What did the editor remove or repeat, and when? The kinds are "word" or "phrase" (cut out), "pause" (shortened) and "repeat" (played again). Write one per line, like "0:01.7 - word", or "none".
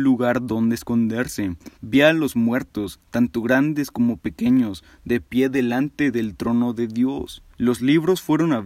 0:01.8 - pause
0:07.5 - pause